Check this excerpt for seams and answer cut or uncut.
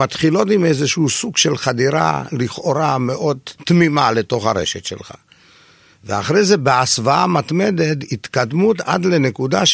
uncut